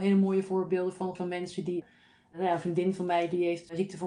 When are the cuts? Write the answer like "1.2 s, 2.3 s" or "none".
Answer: 1.2 s